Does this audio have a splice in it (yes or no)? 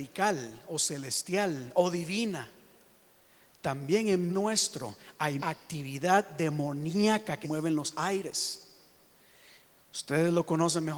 yes